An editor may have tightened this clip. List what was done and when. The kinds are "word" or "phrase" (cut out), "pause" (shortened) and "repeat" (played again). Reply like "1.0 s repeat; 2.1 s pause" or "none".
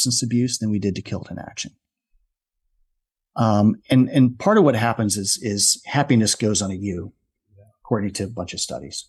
none